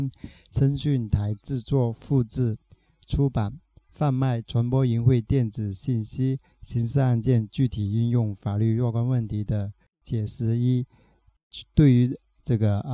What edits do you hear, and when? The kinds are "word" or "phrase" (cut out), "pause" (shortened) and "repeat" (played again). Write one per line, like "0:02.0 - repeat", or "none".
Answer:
none

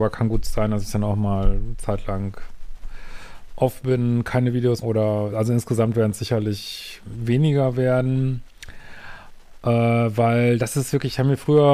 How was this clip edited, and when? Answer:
0:04.8 - word
0:05.3 - word

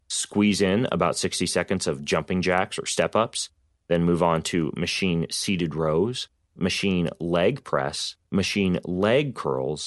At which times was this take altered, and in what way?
0:08.2 - pause

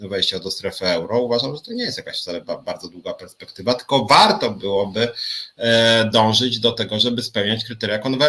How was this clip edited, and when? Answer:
none

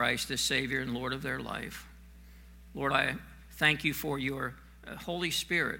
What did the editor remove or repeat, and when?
0:02.9 - word

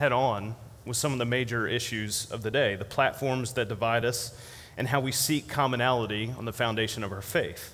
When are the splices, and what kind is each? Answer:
none

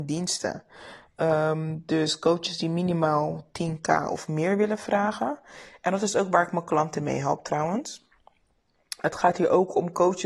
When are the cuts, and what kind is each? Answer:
none

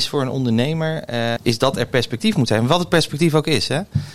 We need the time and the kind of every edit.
0:01.4 - word

